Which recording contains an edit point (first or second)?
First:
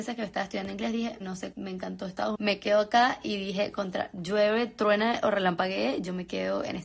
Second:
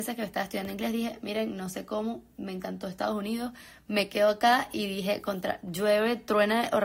first